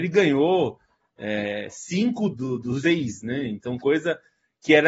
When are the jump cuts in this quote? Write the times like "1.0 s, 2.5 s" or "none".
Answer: 2.3 s, 2.8 s, 3.8 s